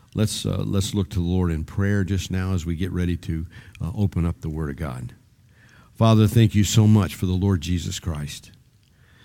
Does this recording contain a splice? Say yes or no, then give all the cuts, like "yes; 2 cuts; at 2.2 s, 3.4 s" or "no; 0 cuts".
no; 0 cuts